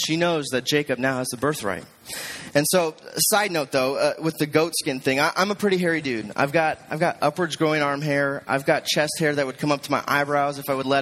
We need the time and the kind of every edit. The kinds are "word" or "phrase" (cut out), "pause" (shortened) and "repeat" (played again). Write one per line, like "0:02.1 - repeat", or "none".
none